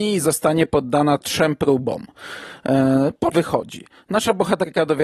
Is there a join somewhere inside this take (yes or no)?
yes